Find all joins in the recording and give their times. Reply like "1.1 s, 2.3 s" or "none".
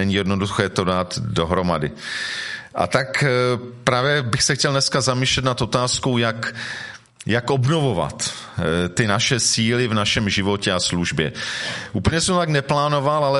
none